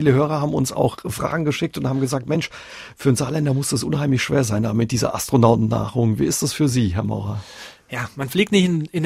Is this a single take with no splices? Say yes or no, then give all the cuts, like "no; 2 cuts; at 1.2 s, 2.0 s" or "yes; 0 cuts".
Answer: yes; 0 cuts